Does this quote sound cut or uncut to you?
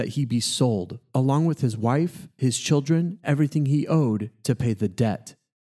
cut